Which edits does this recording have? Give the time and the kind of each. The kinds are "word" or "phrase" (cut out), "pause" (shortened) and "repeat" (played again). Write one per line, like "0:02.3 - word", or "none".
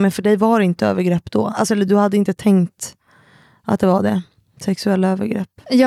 none